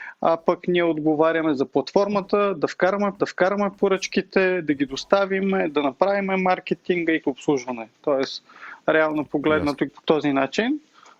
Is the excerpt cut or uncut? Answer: cut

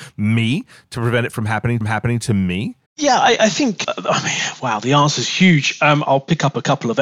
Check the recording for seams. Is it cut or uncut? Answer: cut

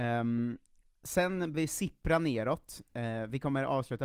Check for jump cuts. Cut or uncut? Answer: cut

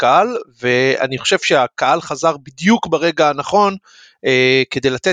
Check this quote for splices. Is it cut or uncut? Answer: uncut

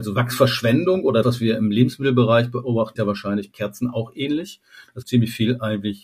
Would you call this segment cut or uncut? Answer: cut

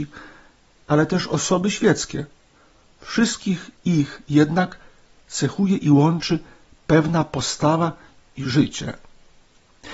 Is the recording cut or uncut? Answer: uncut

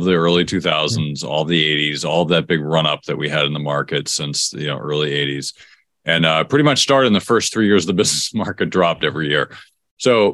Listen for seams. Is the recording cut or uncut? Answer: uncut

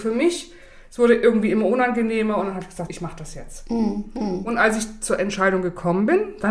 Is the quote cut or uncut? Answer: cut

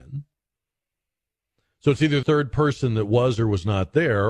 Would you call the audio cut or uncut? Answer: cut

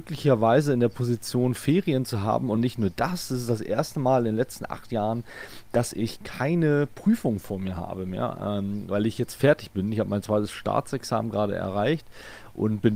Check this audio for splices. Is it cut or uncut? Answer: uncut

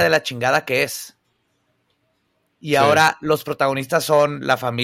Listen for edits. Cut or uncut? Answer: uncut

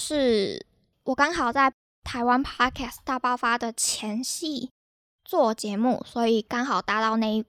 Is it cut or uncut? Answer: uncut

